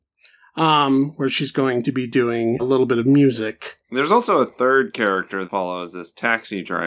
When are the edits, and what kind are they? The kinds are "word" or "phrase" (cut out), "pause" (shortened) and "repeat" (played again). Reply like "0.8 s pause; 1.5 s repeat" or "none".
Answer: 2.6 s word; 3.8 s pause; 5.4 s phrase